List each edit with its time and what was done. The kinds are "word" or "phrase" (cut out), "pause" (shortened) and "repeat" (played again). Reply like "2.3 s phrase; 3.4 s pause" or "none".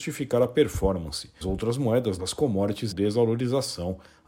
1.4 s word; 2.2 s word; 2.9 s word